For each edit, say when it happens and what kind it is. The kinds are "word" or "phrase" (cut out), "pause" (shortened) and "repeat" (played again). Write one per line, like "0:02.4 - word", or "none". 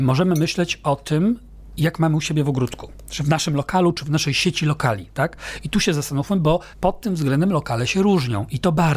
0:06.7 - pause